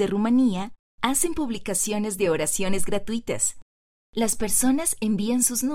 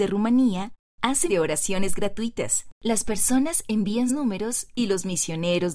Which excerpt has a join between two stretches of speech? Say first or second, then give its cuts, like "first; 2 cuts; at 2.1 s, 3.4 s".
second; 3 cuts; at 1.3 s, 2.7 s, 4.1 s